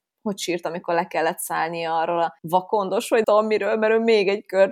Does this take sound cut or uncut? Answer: cut